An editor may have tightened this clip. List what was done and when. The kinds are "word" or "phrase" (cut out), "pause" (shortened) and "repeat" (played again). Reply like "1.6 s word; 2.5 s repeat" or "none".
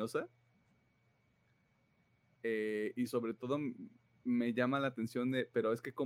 none